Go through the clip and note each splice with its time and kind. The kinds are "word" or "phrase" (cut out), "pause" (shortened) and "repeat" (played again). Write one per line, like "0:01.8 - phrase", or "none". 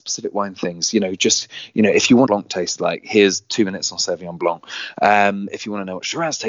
0:02.3 - phrase